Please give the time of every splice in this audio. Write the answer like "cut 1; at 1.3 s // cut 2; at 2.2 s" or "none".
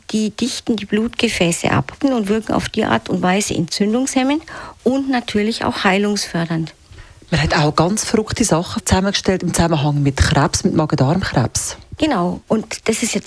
none